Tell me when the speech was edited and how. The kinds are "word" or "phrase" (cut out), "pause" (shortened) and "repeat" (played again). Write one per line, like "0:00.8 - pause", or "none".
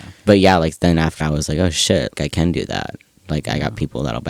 0:01.2 - word
0:02.1 - word